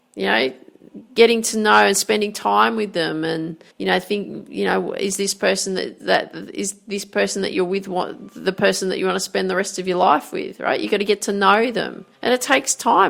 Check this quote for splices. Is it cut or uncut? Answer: cut